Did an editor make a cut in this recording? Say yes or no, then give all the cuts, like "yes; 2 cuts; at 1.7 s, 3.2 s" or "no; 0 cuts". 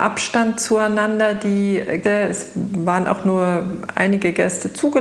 yes; 1 cut; at 2.0 s